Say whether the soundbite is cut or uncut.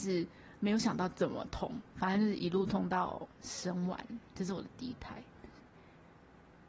cut